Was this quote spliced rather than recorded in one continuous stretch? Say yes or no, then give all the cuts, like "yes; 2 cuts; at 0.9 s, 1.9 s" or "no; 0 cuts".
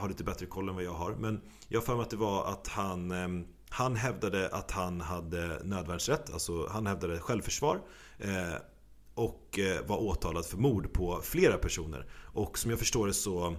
no; 0 cuts